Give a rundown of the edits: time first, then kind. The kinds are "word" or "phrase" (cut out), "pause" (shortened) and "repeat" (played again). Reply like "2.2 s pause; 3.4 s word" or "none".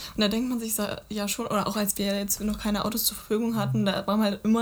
none